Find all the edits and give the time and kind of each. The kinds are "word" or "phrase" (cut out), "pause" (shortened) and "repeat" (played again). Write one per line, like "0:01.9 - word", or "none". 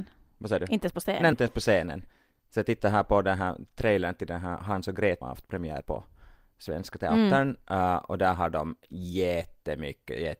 0:01.3 - word
0:05.2 - word
0:05.8 - word

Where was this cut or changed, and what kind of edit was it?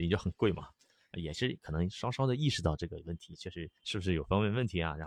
0:03.8 - pause

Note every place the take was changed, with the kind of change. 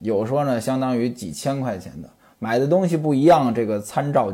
none

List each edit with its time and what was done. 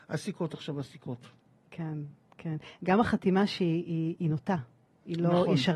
none

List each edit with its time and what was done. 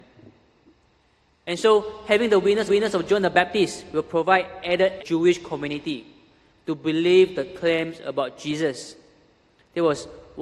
0:02.7 - repeat
0:05.0 - phrase

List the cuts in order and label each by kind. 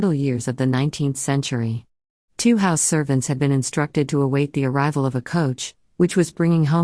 none

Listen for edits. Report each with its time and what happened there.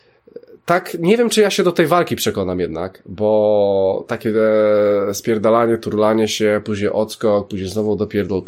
none

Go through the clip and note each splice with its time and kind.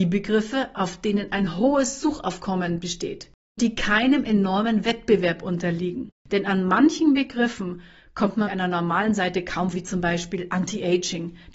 0:03.6 - word
0:06.2 - pause
0:08.5 - word
0:09.7 - word

